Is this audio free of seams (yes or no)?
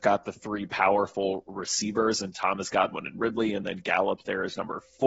yes